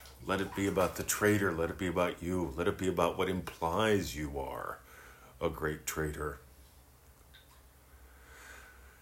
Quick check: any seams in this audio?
no; 0 cuts

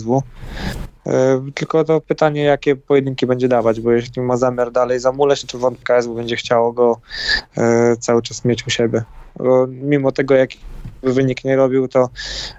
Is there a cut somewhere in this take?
yes; 2 cuts; at 5.4 s, 5.8 s

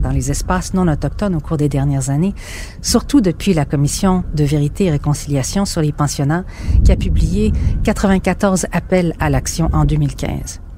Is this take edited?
no; 0 cuts

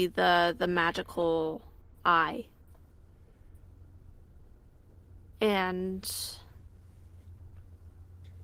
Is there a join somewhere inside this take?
no; 0 cuts

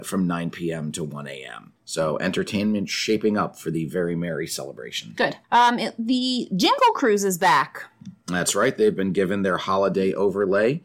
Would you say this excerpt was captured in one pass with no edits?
no; 2 cuts; at 1.8 s, 5.4 s

